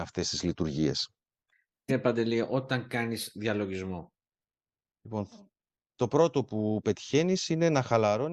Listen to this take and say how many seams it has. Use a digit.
1